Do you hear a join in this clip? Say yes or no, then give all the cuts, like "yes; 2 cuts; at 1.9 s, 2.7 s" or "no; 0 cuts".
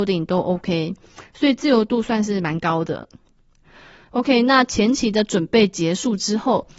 no; 0 cuts